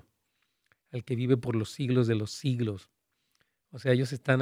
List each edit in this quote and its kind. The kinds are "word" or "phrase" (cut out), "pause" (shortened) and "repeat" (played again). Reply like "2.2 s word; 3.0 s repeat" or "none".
none